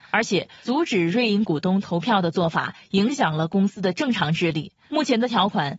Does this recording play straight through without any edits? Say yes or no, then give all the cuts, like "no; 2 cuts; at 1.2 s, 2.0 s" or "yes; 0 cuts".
yes; 0 cuts